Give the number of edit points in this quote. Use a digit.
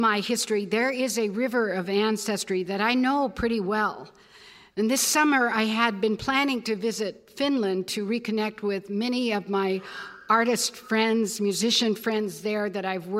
0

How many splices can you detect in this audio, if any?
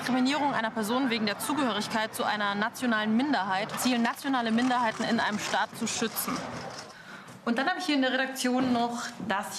1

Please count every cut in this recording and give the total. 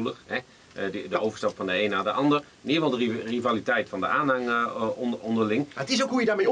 1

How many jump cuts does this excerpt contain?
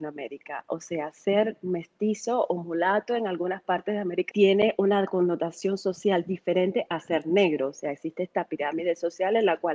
1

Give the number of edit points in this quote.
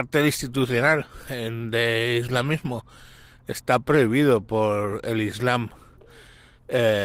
0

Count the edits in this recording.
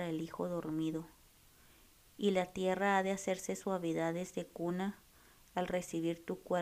0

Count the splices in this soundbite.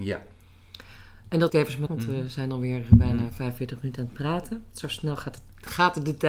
2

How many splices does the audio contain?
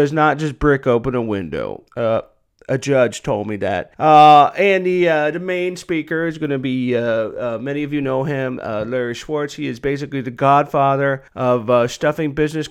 3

